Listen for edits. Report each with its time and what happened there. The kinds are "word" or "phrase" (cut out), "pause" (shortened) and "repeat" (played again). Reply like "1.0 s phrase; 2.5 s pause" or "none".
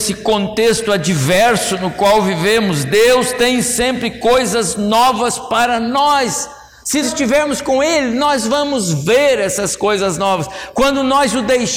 7.0 s word